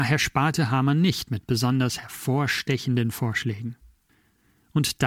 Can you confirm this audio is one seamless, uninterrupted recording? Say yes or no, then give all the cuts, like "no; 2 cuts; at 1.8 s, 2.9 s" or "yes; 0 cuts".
yes; 0 cuts